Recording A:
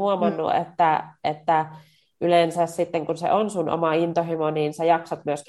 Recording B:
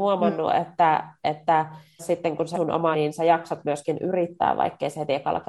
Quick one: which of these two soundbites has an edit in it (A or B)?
B